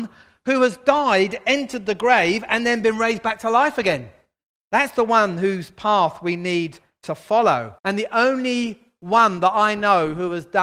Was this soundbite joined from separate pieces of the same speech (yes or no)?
yes